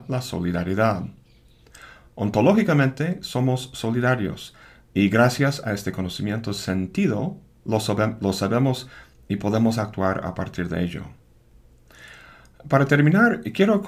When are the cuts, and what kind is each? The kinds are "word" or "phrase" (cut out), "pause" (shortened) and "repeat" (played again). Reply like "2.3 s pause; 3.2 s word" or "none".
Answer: none